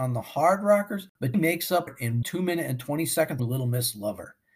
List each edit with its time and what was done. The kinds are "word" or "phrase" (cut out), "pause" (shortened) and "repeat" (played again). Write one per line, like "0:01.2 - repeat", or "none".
0:01.3 - word
0:01.9 - word
0:02.2 - word
0:03.4 - word